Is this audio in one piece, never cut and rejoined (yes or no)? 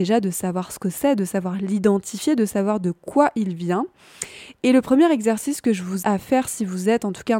no